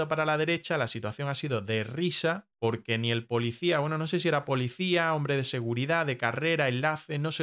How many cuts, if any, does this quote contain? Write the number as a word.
one